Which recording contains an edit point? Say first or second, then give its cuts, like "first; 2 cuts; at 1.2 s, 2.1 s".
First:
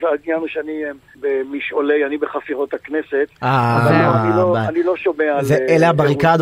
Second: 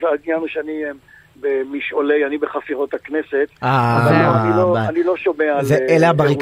first; 1 cut; at 1.1 s